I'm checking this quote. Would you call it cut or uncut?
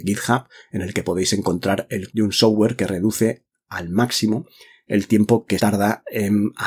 cut